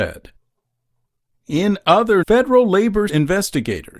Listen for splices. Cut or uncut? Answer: cut